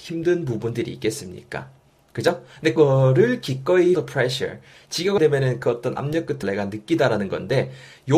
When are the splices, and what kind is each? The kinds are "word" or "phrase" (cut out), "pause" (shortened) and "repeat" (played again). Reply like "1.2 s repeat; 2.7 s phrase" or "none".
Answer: 2.8 s word; 3.9 s word; 5.2 s word; 6.0 s word; 6.4 s word